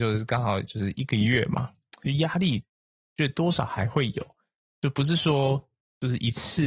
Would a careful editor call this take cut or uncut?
uncut